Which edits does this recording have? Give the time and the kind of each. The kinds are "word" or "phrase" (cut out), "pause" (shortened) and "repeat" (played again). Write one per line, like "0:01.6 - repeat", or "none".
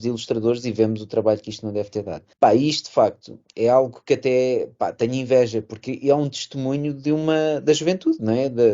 0:02.3 - pause